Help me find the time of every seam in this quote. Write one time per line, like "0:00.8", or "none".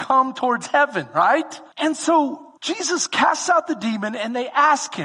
0:01.7
0:02.6